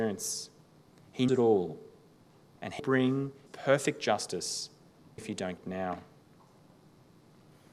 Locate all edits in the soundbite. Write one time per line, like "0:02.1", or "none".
0:01.3
0:02.8
0:03.5
0:05.2
0:05.6